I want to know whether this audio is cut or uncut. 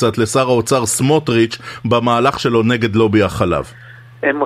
uncut